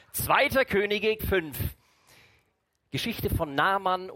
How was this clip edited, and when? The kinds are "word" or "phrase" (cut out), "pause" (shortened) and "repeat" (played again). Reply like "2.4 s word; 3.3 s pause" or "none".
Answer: 1.2 s word